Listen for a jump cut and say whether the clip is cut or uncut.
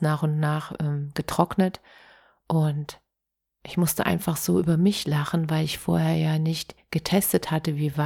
uncut